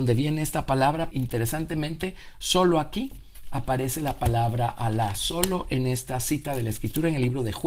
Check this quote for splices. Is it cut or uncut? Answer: cut